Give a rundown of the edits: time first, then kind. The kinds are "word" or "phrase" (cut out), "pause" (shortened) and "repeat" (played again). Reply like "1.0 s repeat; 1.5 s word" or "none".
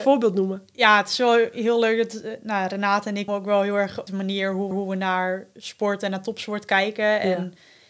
3.3 s word; 4.1 s phrase; 4.7 s repeat

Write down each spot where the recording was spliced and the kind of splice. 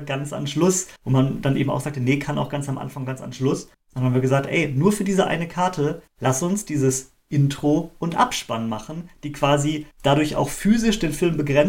1.0 s pause; 3.7 s pause; 6.1 s pause; 9.9 s pause

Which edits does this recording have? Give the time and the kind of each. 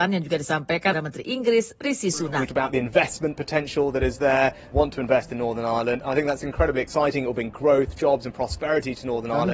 0.9 s phrase; 2.5 s word; 4.7 s phrase

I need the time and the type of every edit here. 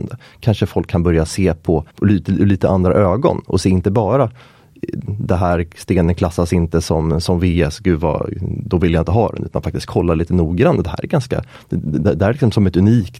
1.9 s pause

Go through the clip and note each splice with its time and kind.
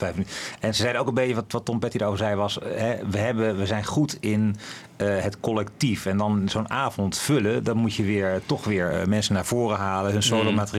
none

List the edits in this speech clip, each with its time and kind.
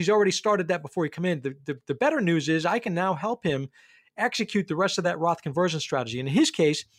none

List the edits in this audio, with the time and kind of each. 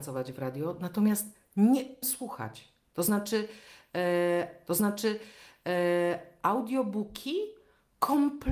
2.0 s word; 4.7 s repeat

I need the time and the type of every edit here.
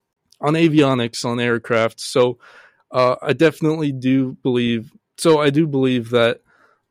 none

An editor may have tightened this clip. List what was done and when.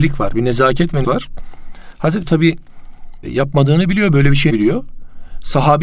1.0 s word; 2.2 s word; 4.5 s word

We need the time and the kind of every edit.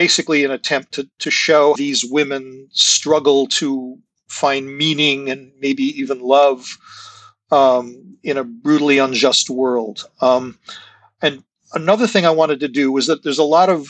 1.8 s phrase

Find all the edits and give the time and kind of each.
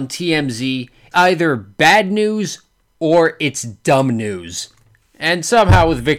1.1 s word

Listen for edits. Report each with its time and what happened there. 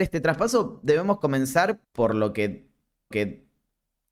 1.8 s pause; 3.1 s repeat

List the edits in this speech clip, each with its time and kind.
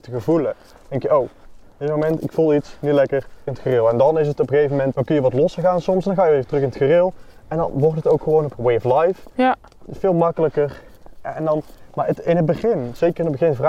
3.5 s word; 4.9 s word; 8.5 s phrase

